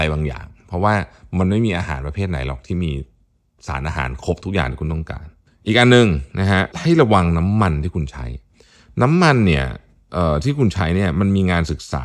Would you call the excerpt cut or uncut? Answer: cut